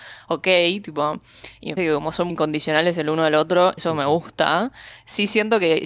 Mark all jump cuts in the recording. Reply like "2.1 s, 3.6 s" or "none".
1.8 s, 2.3 s, 3.8 s